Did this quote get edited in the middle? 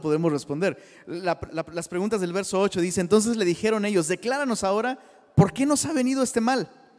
yes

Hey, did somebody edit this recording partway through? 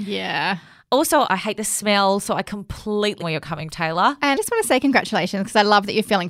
yes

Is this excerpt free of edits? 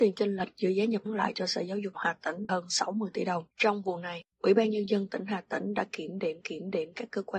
no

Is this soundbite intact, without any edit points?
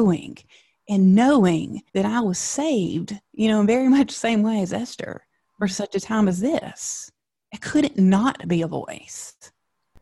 no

